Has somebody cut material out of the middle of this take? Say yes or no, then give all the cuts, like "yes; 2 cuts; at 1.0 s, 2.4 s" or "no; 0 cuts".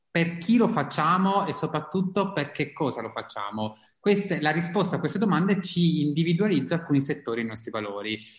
no; 0 cuts